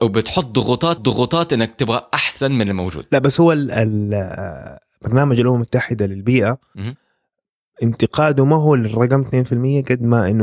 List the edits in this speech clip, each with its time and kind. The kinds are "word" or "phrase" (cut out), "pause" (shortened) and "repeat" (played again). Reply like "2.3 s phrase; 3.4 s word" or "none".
1.0 s repeat